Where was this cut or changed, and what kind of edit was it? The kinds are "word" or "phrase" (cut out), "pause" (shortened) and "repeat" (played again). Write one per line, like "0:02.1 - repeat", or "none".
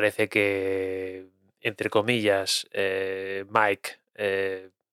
none